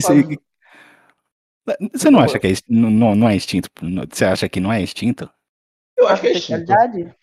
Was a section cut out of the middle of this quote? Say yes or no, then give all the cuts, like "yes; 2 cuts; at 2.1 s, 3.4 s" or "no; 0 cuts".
no; 0 cuts